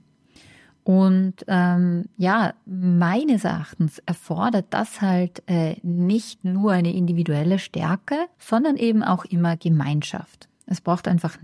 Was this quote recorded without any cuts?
no; 1 cut; at 8.3 s

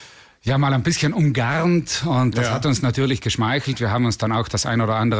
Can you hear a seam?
no; 0 cuts

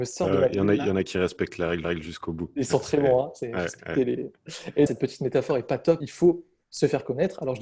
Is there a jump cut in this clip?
yes; 3 cuts; at 1.8 s, 4.9 s, 6.0 s

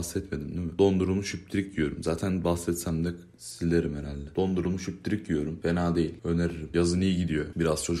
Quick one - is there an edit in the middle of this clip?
no; 0 cuts

